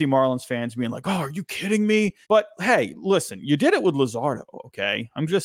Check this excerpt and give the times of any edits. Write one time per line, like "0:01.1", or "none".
0:02.2